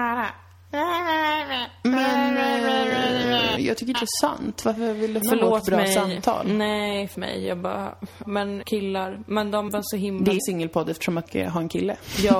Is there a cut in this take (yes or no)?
yes